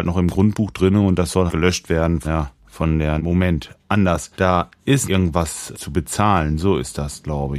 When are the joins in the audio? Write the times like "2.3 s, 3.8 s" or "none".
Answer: 1.5 s, 2.2 s, 2.6 s, 3.2 s, 4.3 s, 5.0 s, 5.7 s